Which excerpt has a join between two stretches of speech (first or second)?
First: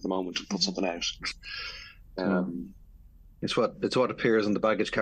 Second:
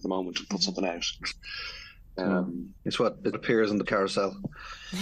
second